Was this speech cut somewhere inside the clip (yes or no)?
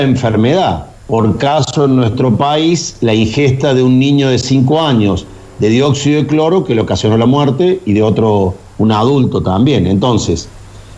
yes